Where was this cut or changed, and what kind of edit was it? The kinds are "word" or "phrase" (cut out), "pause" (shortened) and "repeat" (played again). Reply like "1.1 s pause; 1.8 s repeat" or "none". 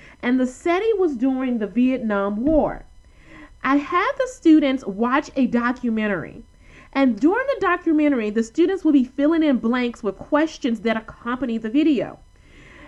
none